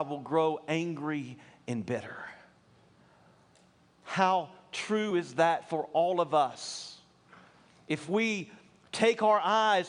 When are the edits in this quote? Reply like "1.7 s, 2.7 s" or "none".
none

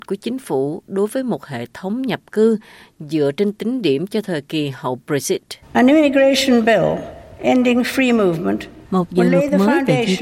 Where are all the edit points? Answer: 5.6 s, 8.8 s

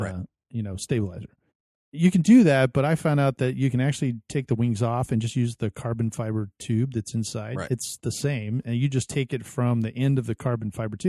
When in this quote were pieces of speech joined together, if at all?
1.5 s

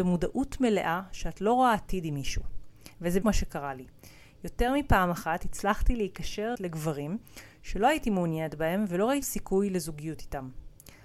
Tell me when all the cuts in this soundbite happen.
3.2 s, 6.5 s, 9.2 s

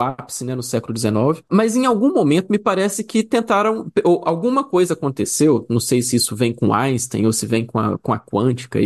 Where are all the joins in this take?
none

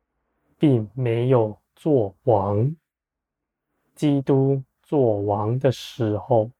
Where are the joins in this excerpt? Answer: none

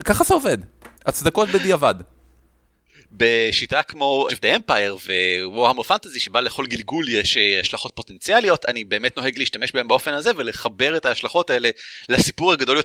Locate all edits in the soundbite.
1.0 s, 4.3 s

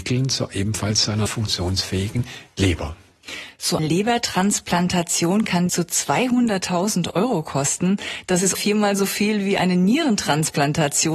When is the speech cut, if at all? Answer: 1.3 s, 3.8 s, 5.7 s, 8.5 s

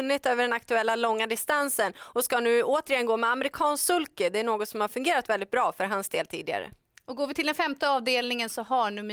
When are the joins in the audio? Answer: none

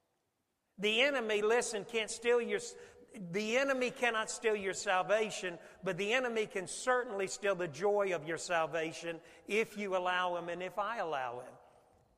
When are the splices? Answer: none

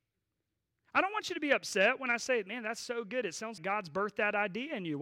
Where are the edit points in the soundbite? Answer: 3.6 s

